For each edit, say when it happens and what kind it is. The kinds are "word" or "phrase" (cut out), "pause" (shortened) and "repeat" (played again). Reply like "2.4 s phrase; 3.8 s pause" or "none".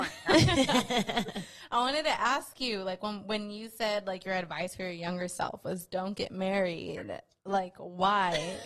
none